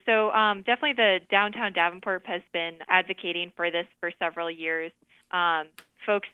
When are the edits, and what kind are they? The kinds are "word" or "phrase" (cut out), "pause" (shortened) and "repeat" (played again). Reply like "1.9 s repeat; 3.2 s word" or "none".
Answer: 2.2 s word; 2.8 s word